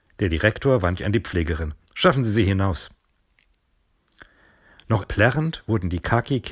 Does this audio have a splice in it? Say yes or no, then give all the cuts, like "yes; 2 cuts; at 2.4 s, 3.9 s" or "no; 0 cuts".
yes; 2 cuts; at 1.0 s, 5.0 s